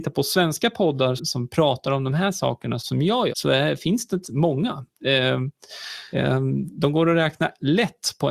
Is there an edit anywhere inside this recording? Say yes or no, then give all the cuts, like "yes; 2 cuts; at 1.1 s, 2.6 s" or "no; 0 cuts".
yes; 5 cuts; at 1.2 s, 2.8 s, 3.3 s, 4.2 s, 6.1 s